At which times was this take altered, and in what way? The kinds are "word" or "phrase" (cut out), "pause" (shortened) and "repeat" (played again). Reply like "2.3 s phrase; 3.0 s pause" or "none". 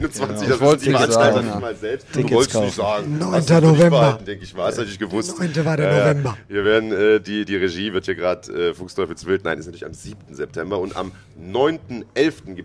none